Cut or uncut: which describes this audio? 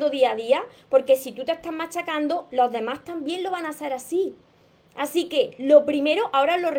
uncut